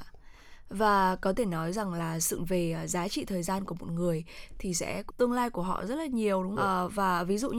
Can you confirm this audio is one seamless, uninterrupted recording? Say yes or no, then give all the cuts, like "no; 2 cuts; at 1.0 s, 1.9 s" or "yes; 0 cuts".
no; 3 cuts; at 2.4 s, 5.1 s, 6.6 s